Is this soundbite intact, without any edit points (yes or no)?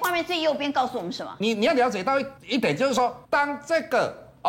no